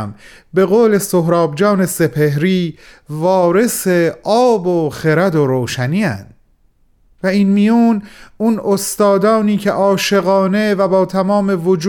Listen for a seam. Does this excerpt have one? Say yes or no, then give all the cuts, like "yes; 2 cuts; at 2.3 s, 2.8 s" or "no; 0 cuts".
no; 0 cuts